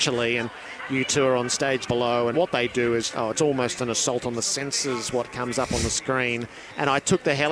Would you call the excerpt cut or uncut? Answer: cut